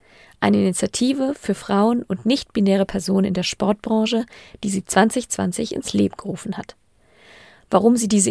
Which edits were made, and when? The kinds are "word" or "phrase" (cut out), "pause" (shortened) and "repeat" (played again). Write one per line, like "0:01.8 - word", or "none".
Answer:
none